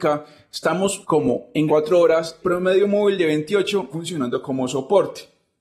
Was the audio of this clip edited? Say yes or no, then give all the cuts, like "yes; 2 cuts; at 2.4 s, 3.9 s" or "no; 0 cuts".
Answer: yes; 4 cuts; at 1.0 s, 1.7 s, 2.4 s, 3.9 s